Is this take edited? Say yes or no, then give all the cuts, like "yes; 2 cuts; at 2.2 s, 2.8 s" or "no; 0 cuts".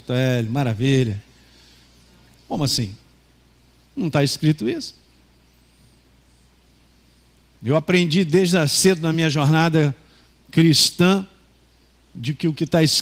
no; 0 cuts